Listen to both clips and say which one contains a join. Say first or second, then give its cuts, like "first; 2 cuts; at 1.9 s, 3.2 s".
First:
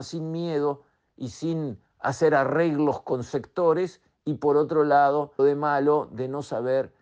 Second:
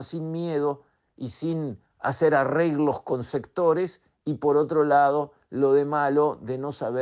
first; 1 cut; at 5.4 s